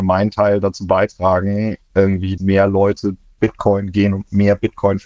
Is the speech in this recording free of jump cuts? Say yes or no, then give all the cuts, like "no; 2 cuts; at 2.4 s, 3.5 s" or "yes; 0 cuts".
no; 2 cuts; at 2.4 s, 3.4 s